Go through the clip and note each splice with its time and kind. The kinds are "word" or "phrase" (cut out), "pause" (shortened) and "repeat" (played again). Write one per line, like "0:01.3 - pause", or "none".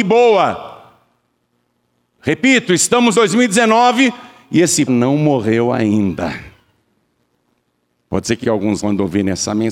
0:03.1 - word
0:04.9 - word
0:08.4 - word
0:08.8 - word